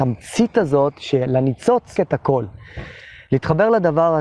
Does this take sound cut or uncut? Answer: cut